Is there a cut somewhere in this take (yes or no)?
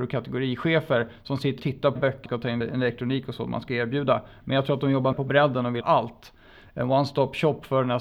yes